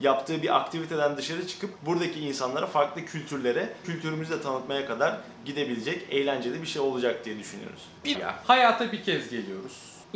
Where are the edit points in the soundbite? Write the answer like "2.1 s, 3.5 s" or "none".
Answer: 3.8 s, 8.1 s